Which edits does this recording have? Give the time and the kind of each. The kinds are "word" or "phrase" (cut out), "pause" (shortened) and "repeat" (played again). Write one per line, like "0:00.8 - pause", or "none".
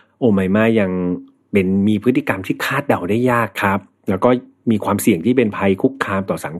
none